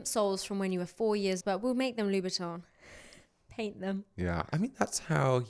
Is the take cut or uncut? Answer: cut